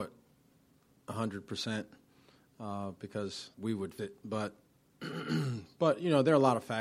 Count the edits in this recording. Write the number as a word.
two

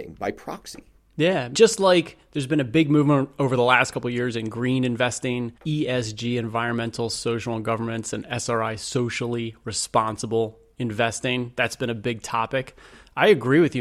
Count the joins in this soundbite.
two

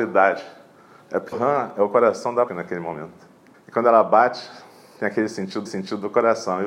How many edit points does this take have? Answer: four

